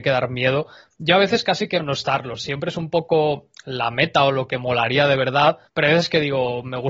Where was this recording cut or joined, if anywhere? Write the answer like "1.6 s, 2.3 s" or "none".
1.8 s, 5.7 s